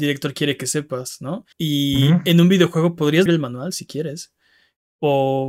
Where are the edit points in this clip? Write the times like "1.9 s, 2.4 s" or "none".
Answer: 1.5 s, 3.3 s